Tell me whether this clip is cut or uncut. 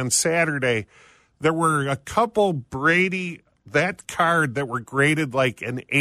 uncut